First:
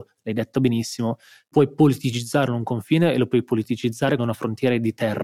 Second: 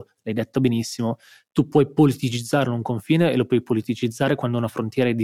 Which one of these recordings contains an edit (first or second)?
first